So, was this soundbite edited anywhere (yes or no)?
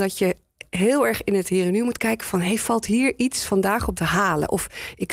yes